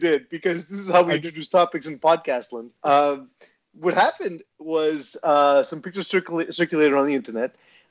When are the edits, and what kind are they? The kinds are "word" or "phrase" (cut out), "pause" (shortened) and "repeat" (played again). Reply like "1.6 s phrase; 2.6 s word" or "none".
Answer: 2.8 s pause